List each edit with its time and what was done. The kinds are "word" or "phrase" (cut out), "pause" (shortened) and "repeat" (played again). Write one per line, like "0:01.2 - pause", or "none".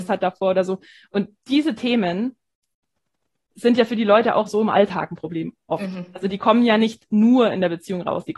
none